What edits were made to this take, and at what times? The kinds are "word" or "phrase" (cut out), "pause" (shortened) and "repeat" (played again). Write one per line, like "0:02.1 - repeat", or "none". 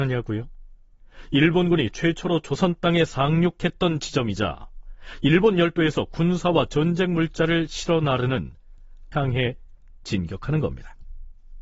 0:09.1 - phrase

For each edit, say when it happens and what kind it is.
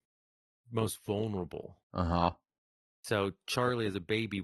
0:01.8 - pause

